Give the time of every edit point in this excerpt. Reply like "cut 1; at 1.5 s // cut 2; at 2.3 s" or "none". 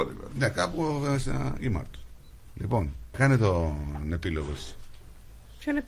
cut 1; at 1.6 s // cut 2; at 3.1 s

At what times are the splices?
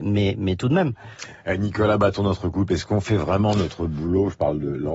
none

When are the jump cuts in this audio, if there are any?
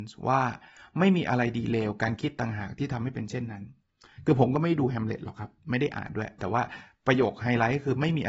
none

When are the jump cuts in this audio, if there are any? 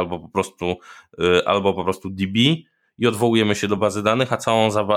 none

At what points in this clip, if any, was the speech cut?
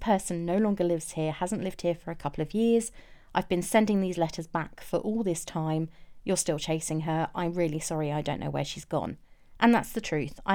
none

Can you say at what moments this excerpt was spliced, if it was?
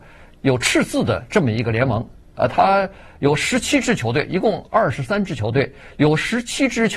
none

